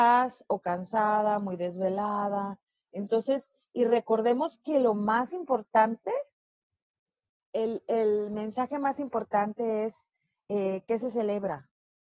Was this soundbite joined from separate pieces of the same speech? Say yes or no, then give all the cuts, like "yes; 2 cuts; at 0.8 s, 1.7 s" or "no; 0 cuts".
no; 0 cuts